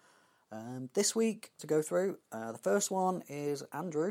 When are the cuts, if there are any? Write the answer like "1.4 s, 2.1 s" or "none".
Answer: 1.6 s